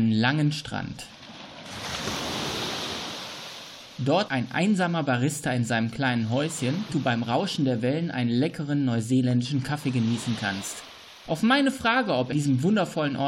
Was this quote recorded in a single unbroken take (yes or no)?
no